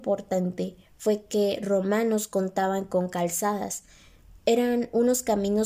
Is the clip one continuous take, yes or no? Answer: yes